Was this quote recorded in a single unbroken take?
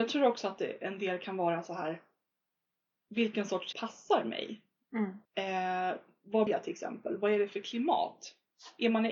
no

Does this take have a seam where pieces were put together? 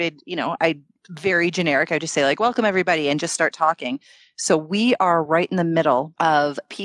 no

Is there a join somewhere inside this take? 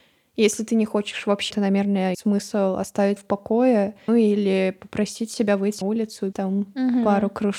yes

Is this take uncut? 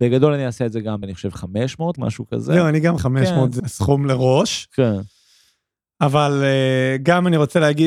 no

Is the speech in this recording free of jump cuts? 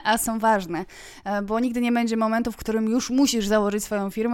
yes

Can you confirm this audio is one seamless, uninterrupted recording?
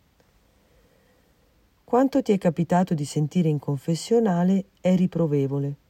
yes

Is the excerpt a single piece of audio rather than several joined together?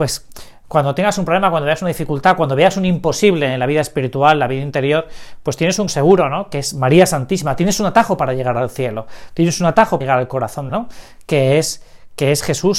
no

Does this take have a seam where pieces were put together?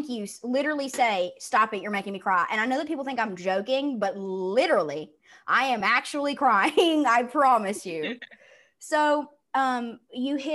no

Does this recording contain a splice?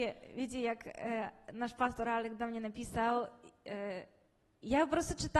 no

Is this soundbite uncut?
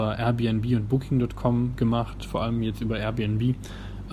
yes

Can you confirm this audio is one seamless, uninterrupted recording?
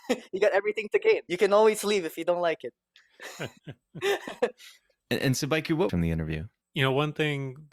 no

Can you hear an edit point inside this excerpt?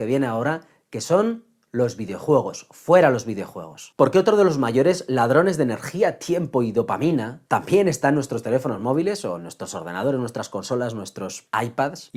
no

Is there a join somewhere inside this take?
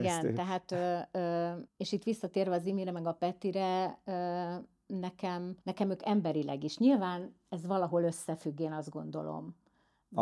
yes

